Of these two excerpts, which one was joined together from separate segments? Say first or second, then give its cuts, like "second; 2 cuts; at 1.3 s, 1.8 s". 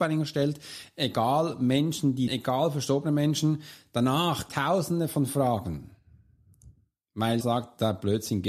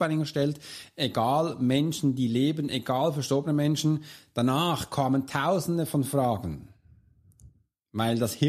first; 3 cuts; at 2.3 s, 4.5 s, 7.4 s